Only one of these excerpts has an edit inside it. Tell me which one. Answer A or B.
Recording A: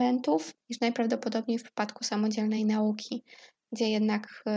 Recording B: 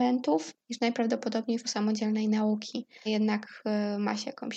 B